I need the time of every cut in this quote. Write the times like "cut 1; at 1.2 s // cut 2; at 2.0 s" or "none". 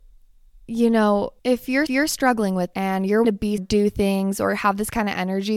cut 1; at 1.4 s // cut 2; at 1.9 s // cut 3; at 2.7 s // cut 4; at 3.2 s // cut 5; at 3.6 s